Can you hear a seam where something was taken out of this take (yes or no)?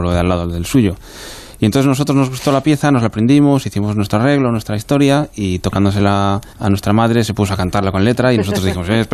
yes